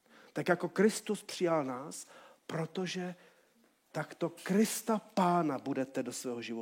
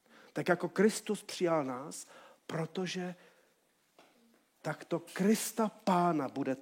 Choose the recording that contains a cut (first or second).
first